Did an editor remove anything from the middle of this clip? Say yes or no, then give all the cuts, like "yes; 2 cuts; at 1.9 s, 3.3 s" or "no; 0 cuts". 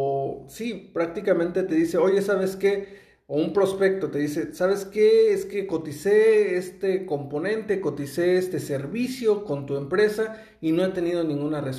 no; 0 cuts